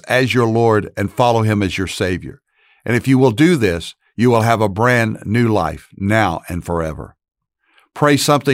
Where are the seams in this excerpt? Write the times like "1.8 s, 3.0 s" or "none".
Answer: none